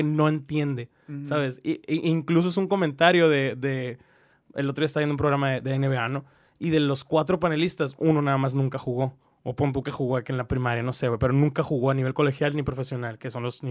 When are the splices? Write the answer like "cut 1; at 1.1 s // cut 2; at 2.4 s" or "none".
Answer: none